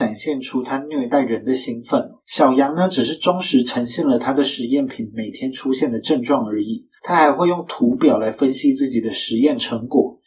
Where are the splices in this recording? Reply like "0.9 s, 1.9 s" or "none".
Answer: 2.2 s, 7.0 s

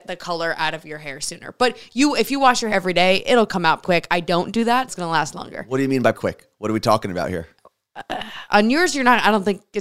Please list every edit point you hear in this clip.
2.7 s, 3.8 s, 4.9 s, 6.1 s

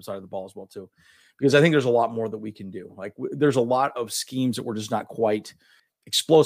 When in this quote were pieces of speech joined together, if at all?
none

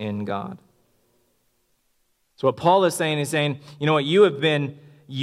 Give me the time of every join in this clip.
none

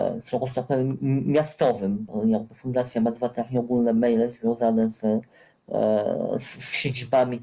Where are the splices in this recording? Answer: none

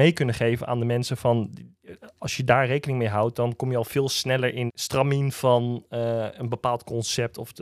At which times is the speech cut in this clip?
4.7 s

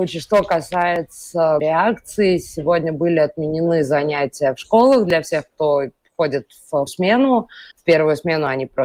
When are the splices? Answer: 1.6 s, 6.9 s, 7.7 s

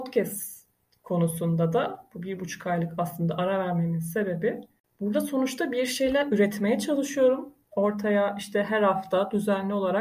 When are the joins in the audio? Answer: none

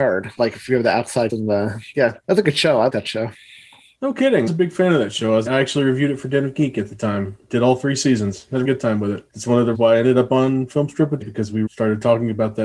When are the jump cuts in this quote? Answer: 1.3 s, 2.9 s, 4.5 s, 5.5 s, 8.6 s, 9.7 s, 11.2 s, 11.7 s

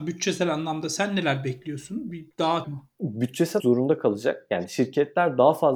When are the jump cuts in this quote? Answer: 2.6 s, 3.6 s

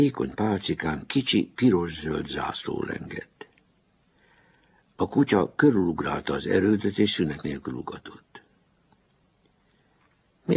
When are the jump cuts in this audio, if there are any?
none

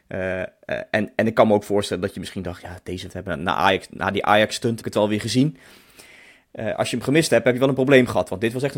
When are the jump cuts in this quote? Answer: 3.1 s, 4.8 s

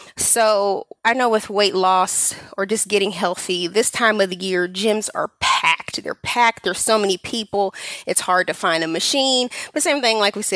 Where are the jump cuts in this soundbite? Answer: none

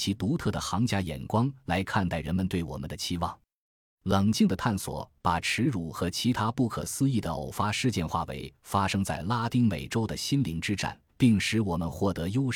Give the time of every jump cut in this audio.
11.1 s

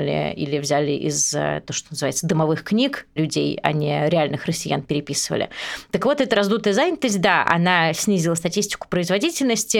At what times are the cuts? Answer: none

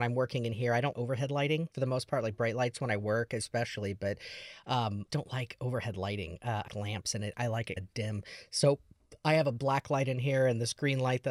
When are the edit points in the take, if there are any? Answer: 0.9 s, 1.7 s, 5.1 s, 6.7 s, 7.8 s

